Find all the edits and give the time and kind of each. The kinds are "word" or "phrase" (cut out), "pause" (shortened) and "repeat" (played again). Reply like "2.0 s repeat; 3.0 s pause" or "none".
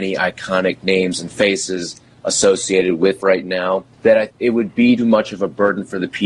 3.2 s phrase; 3.9 s pause; 4.3 s word; 5.0 s word

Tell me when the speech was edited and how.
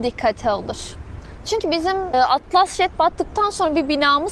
2.1 s word

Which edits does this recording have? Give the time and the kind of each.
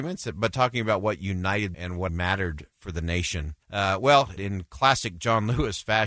1.7 s word; 2.1 s word; 3.6 s pause; 4.4 s phrase

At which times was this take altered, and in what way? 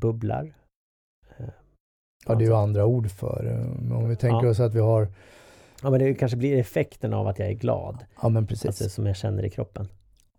none

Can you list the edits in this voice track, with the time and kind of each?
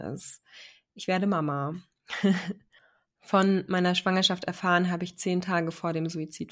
none

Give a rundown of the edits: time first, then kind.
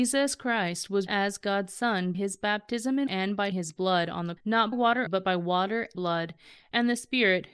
1.1 s word; 2.1 s word; 3.1 s word; 3.5 s word; 4.4 s word; 4.7 s word; 5.1 s word; 5.9 s word

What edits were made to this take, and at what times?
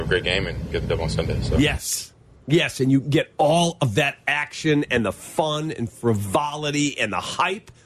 none

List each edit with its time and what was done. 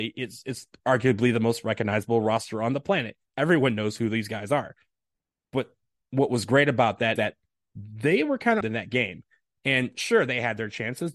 7.2 s word; 8.6 s phrase

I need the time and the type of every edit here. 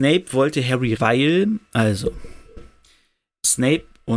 1.0 s word

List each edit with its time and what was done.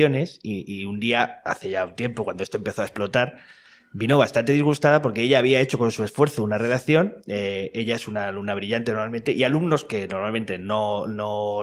none

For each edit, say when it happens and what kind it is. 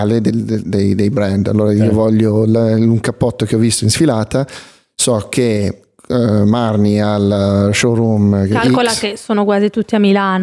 none

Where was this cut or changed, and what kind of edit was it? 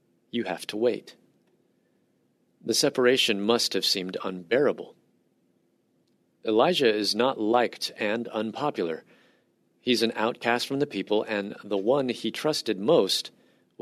none

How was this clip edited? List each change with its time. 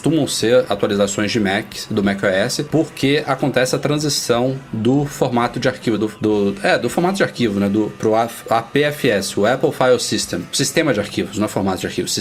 6.0 s word

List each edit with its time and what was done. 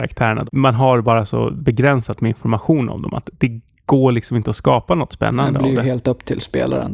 none

